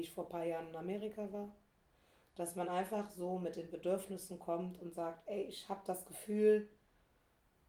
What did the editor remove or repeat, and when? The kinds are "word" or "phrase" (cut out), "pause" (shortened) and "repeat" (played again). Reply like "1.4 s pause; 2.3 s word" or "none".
none